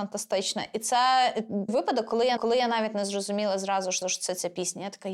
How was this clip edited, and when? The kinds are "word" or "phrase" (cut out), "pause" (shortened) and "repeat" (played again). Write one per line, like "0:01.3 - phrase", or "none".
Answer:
0:01.7 - word
0:02.4 - repeat
0:04.0 - repeat